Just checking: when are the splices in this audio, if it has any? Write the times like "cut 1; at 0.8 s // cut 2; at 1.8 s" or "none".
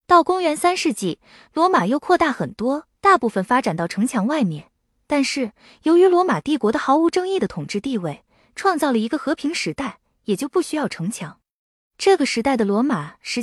cut 1; at 3.0 s